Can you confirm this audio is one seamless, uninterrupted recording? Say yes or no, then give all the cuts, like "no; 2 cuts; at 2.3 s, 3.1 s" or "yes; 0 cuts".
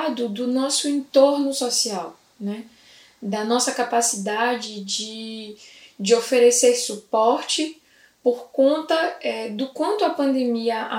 yes; 0 cuts